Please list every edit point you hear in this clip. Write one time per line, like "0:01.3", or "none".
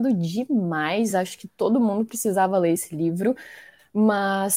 none